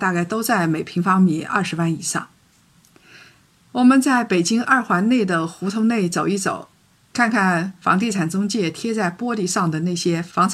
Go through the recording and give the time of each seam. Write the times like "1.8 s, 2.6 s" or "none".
none